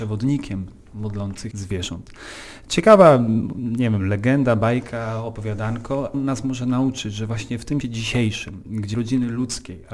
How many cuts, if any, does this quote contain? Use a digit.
4